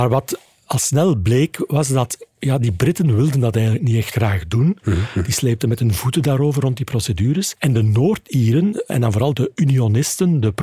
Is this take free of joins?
yes; 0 cuts

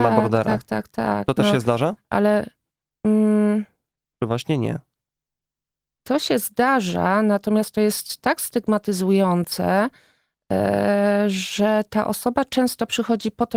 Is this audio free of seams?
yes; 0 cuts

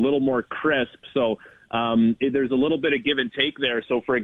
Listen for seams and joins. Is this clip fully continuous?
yes; 0 cuts

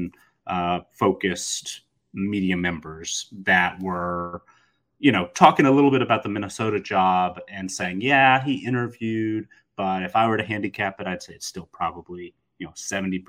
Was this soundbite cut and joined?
no; 0 cuts

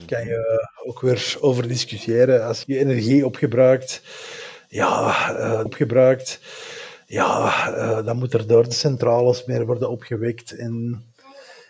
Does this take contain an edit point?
yes; 2 cuts; at 2.6 s, 5.7 s

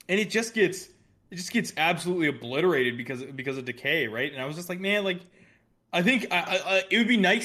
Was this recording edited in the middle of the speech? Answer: no; 0 cuts

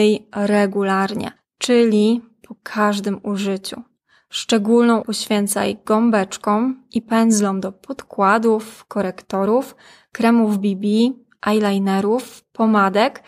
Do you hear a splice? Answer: yes; 2 cuts; at 1.4 s, 5.0 s

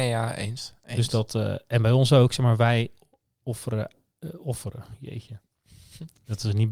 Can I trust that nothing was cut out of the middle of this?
yes; 0 cuts

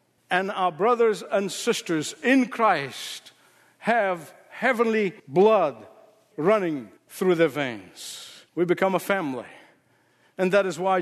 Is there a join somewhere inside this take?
yes; 3 cuts; at 5.2 s, 7.0 s, 8.5 s

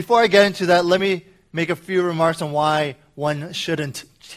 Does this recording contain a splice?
no; 0 cuts

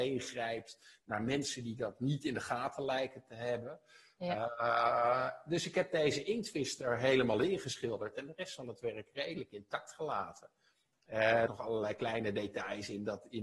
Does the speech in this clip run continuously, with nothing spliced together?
no; 1 cut; at 11.5 s

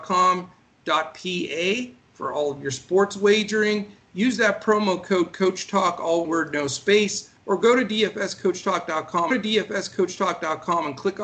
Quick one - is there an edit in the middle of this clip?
yes; 3 cuts; at 6.2 s, 7.4 s, 9.3 s

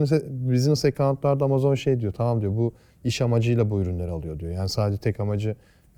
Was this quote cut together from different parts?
no; 0 cuts

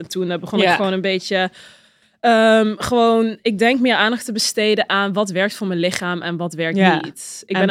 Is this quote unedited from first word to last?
yes; 0 cuts

